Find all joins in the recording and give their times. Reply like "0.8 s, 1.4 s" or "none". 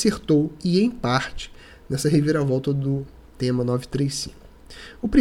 none